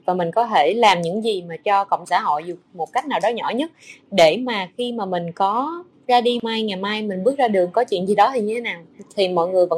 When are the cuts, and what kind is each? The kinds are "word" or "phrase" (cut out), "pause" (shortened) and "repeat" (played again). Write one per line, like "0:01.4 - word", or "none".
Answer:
0:02.0 - word